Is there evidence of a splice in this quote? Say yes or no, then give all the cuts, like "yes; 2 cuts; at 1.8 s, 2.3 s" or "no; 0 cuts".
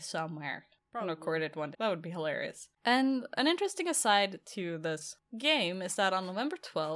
yes; 2 cuts; at 1.7 s, 2.8 s